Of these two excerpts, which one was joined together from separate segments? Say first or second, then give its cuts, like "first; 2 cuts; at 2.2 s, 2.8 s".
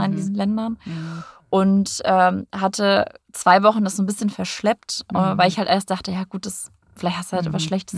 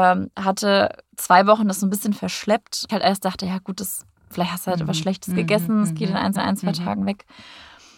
second; 2 cuts; at 2.9 s, 6.4 s